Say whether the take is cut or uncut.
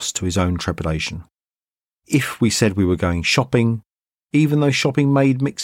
uncut